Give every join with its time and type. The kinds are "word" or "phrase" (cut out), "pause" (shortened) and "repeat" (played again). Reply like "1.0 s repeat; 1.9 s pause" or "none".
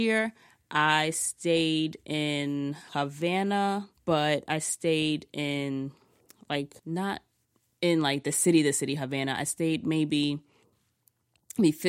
4.0 s pause; 6.8 s pause